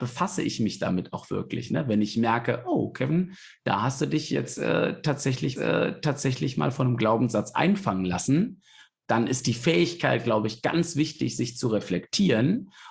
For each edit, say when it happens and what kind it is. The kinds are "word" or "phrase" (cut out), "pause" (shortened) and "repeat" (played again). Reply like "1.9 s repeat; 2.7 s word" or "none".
5.6 s repeat